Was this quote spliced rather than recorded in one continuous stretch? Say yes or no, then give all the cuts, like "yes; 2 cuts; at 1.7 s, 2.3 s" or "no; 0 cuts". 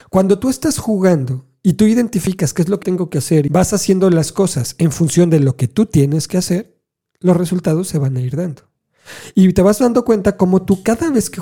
yes; 2 cuts; at 2.8 s, 3.5 s